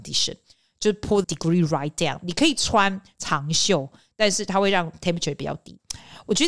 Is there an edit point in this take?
yes; 1 cut; at 1.2 s

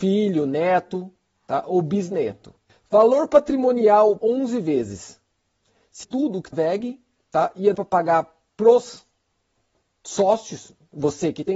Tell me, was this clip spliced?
yes; 5 cuts; at 2.7 s, 4.2 s, 6.0 s, 6.5 s, 7.7 s

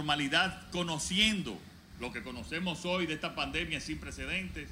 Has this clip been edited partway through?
no; 0 cuts

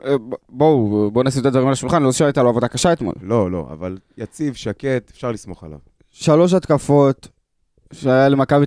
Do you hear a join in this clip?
no; 0 cuts

